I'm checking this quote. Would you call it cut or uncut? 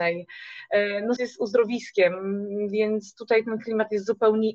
cut